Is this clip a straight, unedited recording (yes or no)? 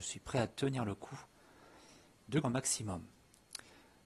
no